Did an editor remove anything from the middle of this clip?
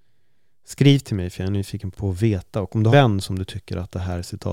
yes; 2 cuts; at 1.9 s, 2.9 s

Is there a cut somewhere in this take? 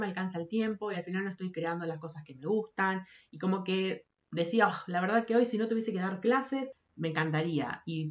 no; 0 cuts

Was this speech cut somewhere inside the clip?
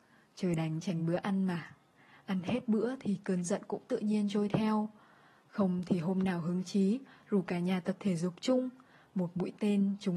no; 0 cuts

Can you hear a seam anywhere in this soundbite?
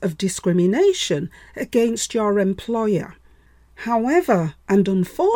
no; 0 cuts

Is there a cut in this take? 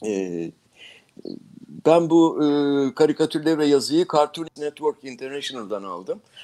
yes; 1 cut; at 4.6 s

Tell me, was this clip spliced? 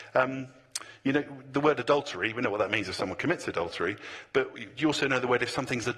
no; 0 cuts

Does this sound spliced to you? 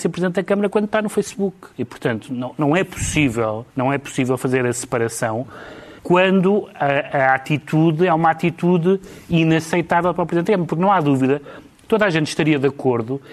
yes; 3 cuts; at 1.7 s, 3.7 s, 6.0 s

